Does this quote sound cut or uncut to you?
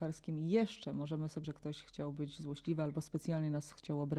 cut